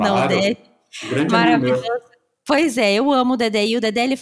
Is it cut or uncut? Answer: uncut